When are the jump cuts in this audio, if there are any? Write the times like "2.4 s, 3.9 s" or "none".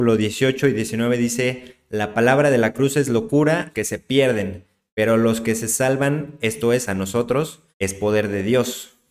3.7 s, 7.7 s